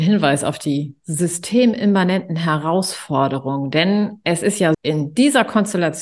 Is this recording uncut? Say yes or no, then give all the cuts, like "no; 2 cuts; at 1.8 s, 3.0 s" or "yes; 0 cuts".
no; 1 cut; at 4.7 s